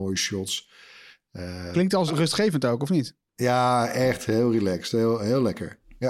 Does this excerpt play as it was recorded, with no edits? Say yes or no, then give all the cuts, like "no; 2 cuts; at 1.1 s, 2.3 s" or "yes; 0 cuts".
no; 1 cut; at 2.1 s